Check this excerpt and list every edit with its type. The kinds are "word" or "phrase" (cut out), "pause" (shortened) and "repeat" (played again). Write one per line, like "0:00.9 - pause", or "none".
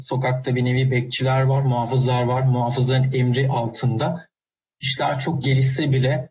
none